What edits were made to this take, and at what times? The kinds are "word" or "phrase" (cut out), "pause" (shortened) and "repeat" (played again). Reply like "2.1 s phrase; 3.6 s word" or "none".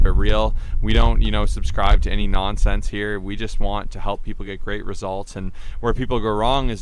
none